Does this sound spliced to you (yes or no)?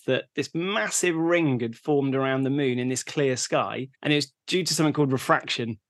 yes